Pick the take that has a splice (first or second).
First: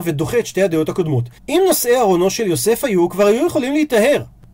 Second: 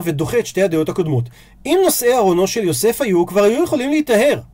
first